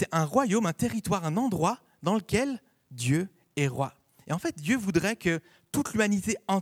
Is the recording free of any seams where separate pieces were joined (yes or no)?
yes